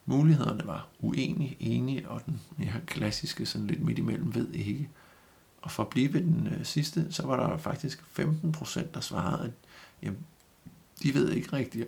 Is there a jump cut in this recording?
no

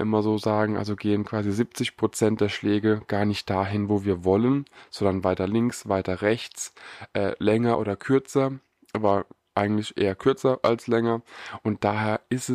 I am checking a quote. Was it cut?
no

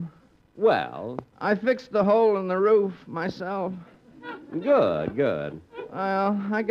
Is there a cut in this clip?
no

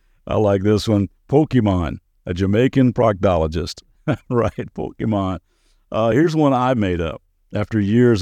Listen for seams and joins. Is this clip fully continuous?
yes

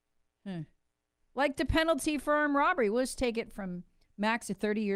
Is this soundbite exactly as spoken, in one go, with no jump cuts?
yes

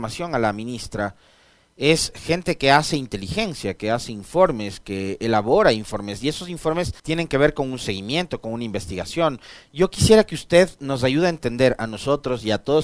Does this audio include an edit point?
yes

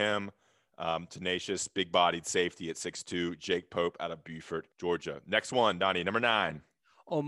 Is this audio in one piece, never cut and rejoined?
no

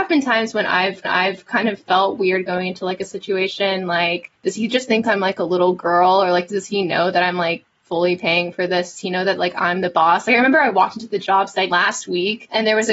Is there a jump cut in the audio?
yes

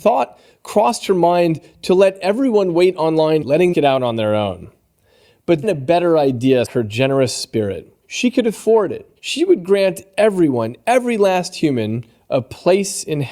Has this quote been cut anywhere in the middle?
yes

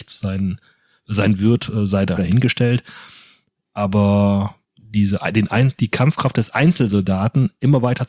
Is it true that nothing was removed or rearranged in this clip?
no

